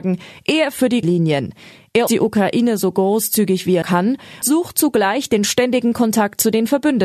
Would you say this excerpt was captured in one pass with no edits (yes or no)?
no